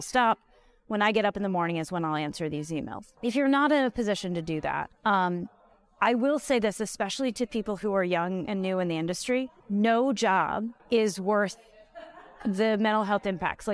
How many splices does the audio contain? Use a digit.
4